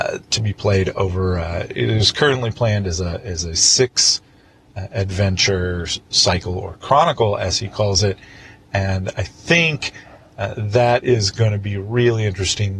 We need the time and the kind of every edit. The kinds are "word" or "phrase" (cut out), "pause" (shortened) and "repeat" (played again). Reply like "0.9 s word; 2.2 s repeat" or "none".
none